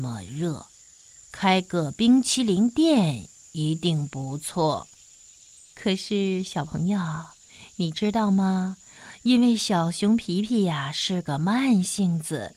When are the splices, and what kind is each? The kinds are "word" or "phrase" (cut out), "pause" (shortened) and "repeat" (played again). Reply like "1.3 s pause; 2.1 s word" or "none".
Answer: 1.2 s pause; 5.2 s pause